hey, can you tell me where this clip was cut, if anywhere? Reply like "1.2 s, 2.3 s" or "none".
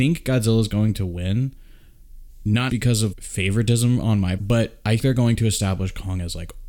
2.7 s, 3.1 s, 4.4 s, 5.0 s